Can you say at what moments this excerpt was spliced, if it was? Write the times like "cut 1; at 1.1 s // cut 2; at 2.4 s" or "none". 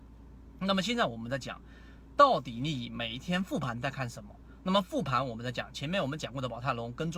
cut 1; at 5.7 s